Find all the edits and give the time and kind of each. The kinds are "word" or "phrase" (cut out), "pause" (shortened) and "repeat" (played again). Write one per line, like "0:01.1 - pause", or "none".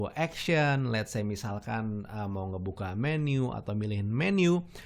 none